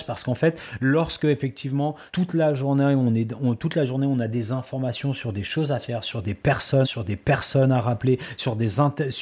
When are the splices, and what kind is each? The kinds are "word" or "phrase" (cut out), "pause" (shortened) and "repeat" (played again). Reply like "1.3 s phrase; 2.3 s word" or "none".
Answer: 2.1 s pause; 6.8 s repeat